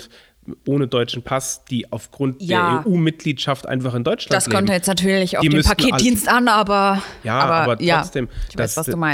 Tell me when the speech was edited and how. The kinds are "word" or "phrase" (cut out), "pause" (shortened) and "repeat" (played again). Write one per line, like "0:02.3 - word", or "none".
none